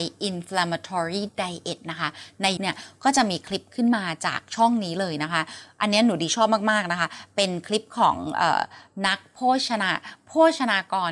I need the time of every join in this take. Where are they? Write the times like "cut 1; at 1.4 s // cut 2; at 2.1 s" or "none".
cut 1; at 2.6 s